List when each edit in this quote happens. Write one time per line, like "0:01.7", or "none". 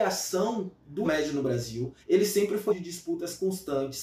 0:01.0
0:02.0
0:02.7